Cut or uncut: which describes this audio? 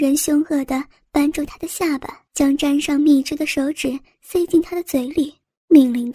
cut